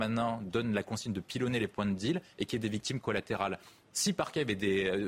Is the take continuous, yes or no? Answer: yes